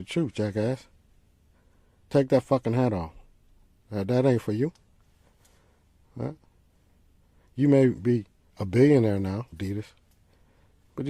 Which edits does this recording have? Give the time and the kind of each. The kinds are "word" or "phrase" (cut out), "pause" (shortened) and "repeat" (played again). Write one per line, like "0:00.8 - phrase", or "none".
0:09.5 - phrase